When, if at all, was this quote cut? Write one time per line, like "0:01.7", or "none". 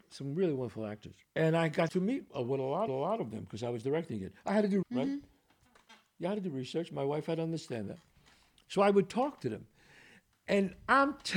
0:01.3
0:01.9
0:02.9
0:04.8

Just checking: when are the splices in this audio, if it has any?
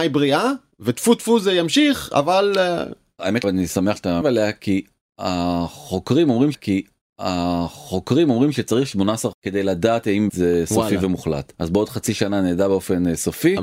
0:03.4
0:04.2
0:06.5
0:09.3
0:10.3
0:11.5

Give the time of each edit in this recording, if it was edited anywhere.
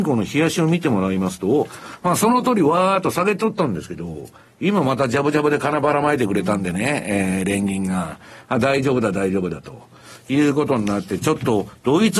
none

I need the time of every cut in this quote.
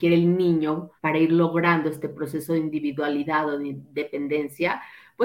0:01.0

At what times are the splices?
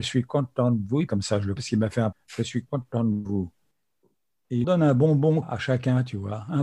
0:01.1
0:01.6
0:02.1
0:04.6
0:05.4

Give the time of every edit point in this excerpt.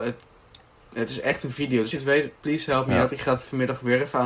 0:01.9

